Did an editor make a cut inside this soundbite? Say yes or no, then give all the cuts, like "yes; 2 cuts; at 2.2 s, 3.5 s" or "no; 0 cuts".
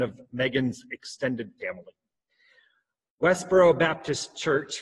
no; 0 cuts